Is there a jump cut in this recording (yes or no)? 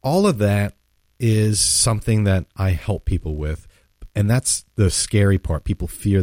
no